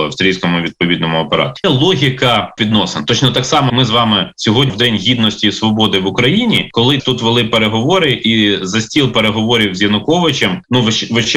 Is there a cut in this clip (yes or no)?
yes